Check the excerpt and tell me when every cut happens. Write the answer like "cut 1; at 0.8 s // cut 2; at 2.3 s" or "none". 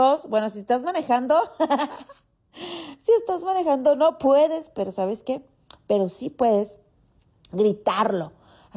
none